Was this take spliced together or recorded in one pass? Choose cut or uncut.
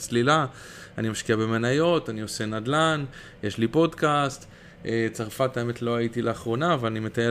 uncut